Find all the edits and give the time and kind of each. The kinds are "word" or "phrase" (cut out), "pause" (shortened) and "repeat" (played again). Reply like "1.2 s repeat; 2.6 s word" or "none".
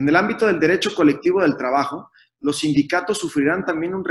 none